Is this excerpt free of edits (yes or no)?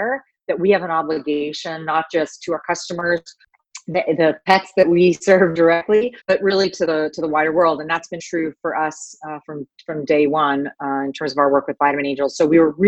no